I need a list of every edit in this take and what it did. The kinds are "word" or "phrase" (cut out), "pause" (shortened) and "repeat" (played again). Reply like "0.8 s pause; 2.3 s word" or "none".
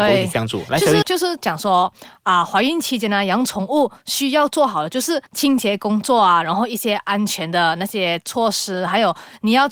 1.0 s phrase; 5.3 s pause

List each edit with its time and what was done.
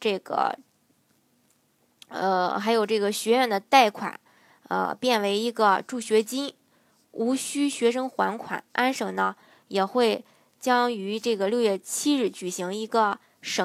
none

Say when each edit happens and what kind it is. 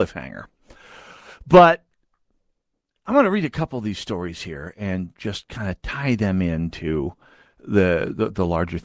none

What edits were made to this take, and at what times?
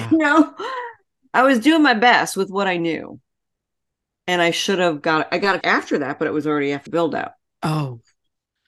5.6 s word; 6.9 s word

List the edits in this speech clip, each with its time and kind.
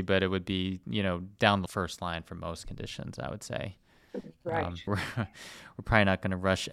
1.7 s phrase; 4.9 s word

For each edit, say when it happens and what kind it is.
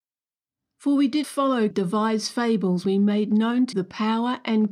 1.2 s word; 1.7 s word; 2.8 s word; 3.7 s word

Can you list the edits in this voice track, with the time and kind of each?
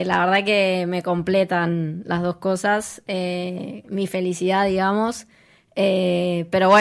none

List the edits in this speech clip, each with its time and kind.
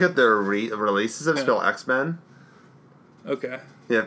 1.4 s phrase

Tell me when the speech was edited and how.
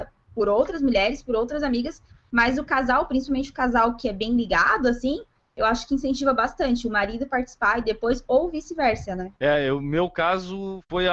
9.4 s pause

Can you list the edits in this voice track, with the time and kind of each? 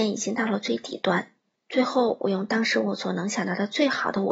1.6 s pause

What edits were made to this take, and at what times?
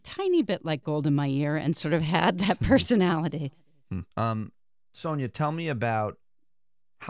4.1 s pause

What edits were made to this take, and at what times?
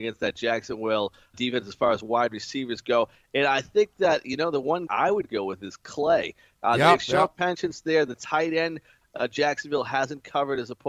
1.3 s word; 4.9 s word

